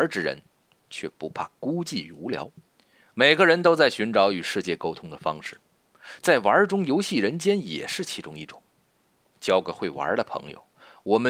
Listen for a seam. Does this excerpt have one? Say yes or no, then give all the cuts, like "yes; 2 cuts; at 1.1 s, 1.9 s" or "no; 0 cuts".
yes; 1 cut; at 2.8 s